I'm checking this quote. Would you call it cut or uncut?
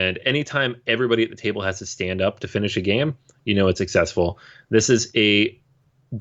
uncut